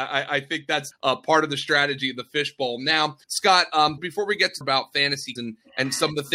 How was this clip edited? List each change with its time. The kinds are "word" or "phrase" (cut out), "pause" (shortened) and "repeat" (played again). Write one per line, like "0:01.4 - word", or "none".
0:00.9 - word
0:03.2 - pause
0:04.0 - word
0:04.6 - phrase
0:05.4 - word